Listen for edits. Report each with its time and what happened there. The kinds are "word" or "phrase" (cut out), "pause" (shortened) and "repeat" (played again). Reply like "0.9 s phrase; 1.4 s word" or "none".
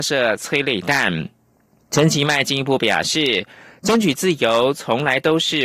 1.5 s pause

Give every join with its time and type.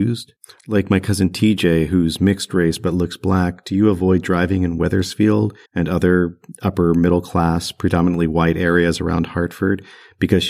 5.7 s pause

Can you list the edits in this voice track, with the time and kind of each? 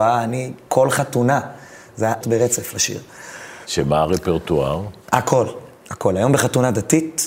2.2 s phrase; 5.8 s pause

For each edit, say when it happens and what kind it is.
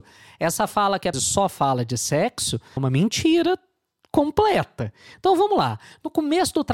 1.1 s word; 2.8 s word

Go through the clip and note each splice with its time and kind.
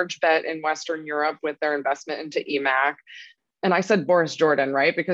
none

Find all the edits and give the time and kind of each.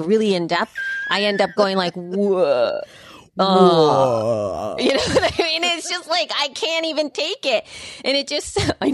none

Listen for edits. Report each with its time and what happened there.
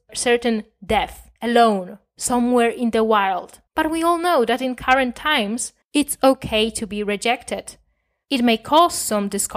1.4 s pause; 3.7 s pause; 5.8 s pause

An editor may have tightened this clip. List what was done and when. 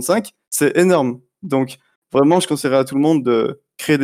none

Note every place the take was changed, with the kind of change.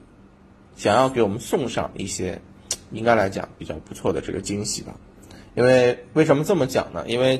none

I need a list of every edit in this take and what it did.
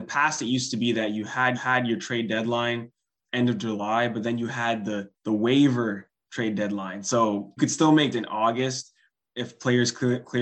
1.5 s repeat; 5.1 s pause; 7.6 s word; 8.1 s word

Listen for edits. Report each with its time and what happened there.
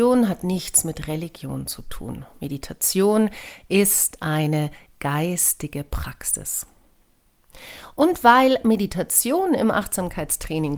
none

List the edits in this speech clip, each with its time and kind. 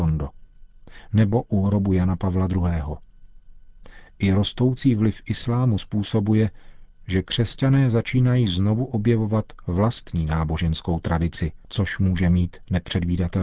none

